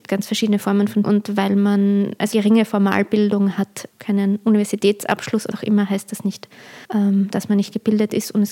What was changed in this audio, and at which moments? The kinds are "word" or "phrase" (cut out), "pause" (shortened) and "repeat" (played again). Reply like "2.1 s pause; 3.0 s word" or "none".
1.0 s word; 2.3 s phrase; 3.9 s word; 5.5 s word; 6.8 s pause

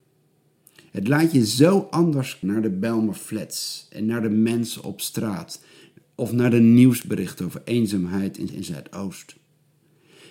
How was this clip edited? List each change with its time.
2.4 s word; 8.5 s word

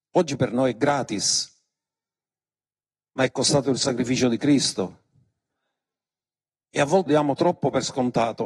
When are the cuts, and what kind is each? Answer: 7.1 s word

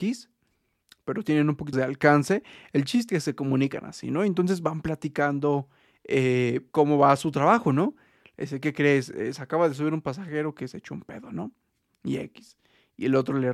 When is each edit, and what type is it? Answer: 1.7 s word; 3.1 s word; 6.7 s word

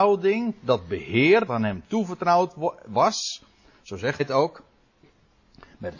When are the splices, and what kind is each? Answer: 1.5 s word; 4.2 s word

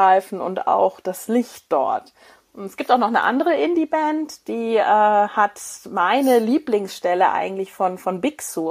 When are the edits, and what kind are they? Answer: none

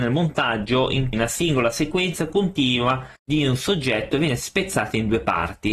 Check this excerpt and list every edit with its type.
1.1 s word; 3.2 s pause

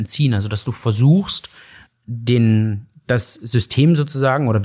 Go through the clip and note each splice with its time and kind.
1.9 s word

